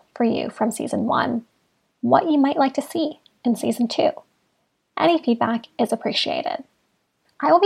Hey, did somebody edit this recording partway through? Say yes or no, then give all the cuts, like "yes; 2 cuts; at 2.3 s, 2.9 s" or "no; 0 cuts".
no; 0 cuts